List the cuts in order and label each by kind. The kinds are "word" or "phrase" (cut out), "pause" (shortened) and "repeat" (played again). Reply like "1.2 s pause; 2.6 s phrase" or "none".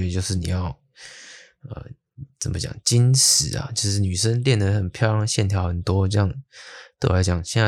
none